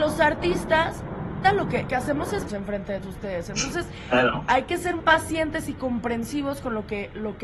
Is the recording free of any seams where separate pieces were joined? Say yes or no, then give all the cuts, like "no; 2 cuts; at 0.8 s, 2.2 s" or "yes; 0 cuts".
no; 5 cuts; at 1.4 s, 1.9 s, 2.5 s, 3.0 s, 5.0 s